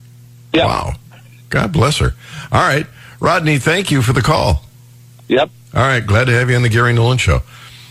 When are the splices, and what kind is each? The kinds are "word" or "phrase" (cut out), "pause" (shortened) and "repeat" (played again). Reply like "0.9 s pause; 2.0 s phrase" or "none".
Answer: none